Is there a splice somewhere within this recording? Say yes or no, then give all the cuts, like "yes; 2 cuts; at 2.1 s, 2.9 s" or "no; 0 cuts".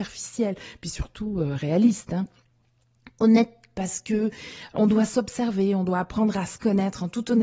no; 0 cuts